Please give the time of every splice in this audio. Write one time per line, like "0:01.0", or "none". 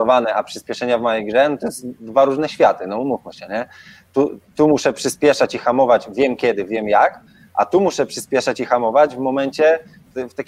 none